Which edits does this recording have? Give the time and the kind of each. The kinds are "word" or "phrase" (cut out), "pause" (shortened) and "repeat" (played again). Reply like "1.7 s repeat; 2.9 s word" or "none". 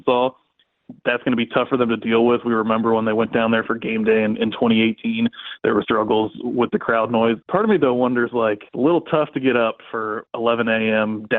5.8 s word; 7.4 s pause; 8.7 s pause